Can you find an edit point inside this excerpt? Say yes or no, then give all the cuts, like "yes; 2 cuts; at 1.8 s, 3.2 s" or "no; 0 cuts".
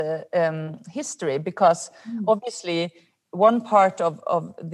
no; 0 cuts